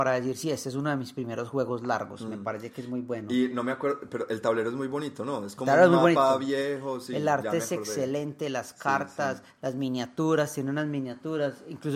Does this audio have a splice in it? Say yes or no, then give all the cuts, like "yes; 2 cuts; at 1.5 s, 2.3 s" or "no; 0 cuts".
no; 0 cuts